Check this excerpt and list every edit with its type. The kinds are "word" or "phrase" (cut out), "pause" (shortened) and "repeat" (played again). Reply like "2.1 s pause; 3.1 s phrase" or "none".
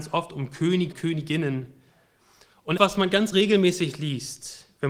0.9 s word; 2.8 s word; 3.3 s word

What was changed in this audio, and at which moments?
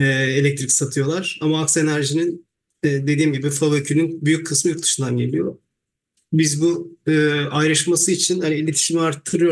none

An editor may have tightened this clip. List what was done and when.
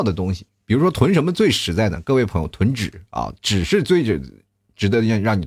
none

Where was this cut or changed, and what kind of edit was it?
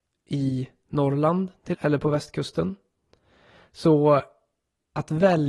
1.7 s word

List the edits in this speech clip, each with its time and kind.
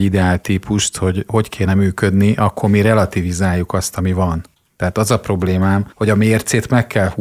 4.5 s pause; 5.9 s pause

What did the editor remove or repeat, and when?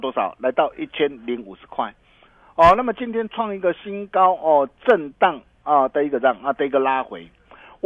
none

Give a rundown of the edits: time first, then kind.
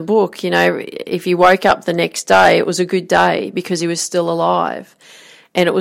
none

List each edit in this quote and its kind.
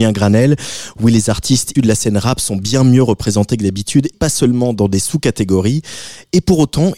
1.7 s word; 4.1 s word

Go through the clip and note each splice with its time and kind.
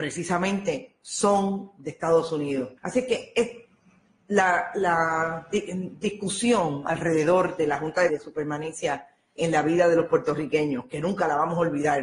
2.8 s pause; 8.1 s phrase; 9.4 s word

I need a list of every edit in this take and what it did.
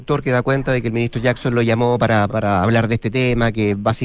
2.3 s word

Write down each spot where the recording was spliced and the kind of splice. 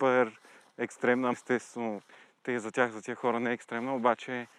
1.3 s word

